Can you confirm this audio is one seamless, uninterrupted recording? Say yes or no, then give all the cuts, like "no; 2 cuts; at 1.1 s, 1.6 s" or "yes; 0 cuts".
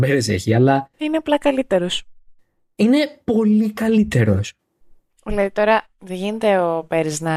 no; 1 cut; at 0.9 s